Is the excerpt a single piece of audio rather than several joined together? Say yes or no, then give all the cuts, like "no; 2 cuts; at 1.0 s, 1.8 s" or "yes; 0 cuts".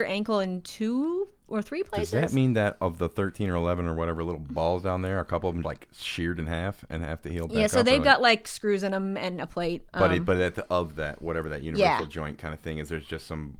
no; 2 cuts; at 5.6 s, 9.9 s